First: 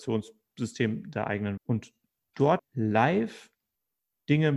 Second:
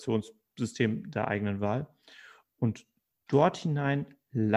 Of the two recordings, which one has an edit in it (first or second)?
first